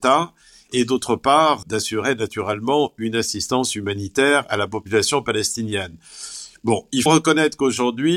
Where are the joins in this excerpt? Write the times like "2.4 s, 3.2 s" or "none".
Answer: 1.6 s, 4.4 s, 7.1 s